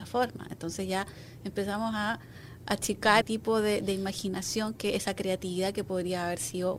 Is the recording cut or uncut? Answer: cut